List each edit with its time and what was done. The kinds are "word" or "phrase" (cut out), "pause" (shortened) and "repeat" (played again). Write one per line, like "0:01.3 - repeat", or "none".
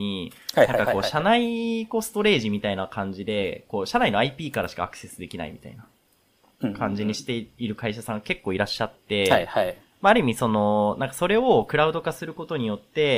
none